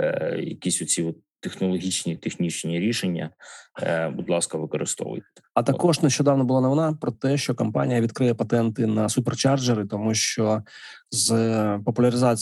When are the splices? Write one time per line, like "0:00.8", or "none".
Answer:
none